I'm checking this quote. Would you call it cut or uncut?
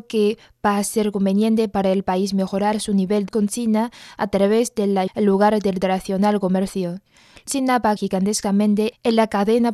cut